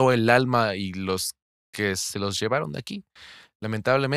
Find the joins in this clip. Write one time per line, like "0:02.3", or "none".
none